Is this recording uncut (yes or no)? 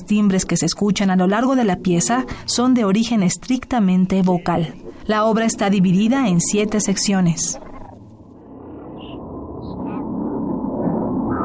yes